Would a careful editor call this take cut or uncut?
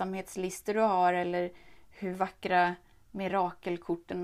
uncut